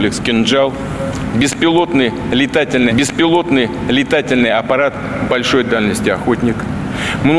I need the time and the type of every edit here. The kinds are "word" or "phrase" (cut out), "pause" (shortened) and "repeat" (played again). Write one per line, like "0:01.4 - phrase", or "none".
0:02.9 - repeat